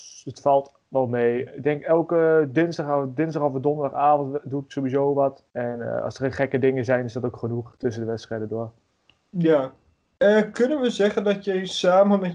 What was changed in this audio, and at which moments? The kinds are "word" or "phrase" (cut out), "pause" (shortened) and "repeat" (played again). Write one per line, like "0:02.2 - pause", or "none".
0:05.5 - pause
0:09.9 - pause